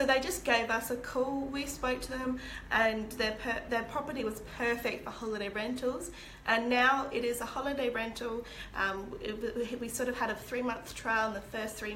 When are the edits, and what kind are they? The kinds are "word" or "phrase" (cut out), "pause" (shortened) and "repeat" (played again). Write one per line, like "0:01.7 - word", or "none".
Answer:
none